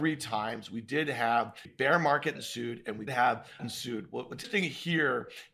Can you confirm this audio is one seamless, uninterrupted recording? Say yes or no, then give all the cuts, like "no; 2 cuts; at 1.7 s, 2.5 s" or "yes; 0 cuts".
no; 5 cuts; at 1.7 s, 2.4 s, 3.1 s, 3.6 s, 4.4 s